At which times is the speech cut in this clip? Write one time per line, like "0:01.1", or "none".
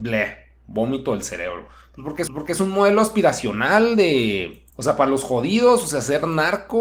0:02.3
0:04.7